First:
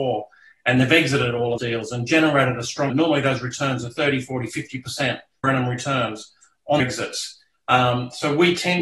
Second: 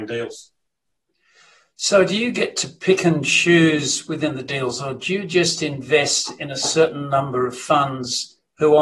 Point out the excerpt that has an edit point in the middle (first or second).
first